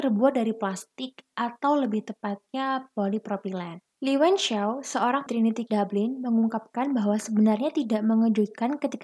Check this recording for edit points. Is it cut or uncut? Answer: cut